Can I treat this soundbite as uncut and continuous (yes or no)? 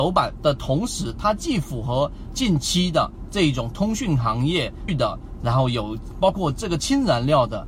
no